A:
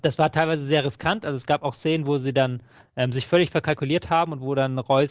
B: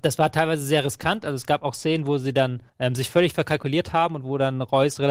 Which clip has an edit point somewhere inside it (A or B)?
B